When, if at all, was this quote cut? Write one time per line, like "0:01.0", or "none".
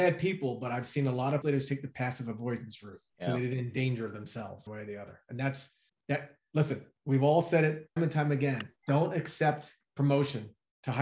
0:01.4
0:03.1
0:04.7
0:05.9
0:07.0
0:08.0
0:08.8